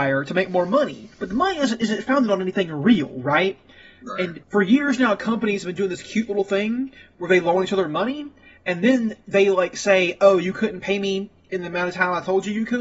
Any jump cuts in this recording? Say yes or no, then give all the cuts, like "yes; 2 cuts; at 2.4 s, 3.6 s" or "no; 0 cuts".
yes; 2 cuts; at 1.1 s, 4.4 s